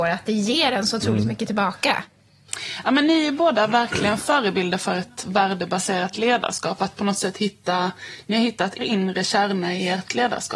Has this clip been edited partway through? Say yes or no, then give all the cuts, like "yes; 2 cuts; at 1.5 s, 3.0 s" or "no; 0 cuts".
yes; 1 cut; at 8.8 s